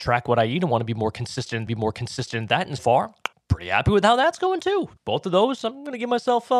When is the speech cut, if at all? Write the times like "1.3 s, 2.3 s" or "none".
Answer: 1.7 s, 2.8 s, 3.3 s, 5.0 s